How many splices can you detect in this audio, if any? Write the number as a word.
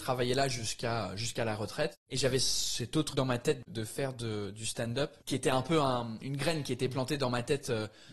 three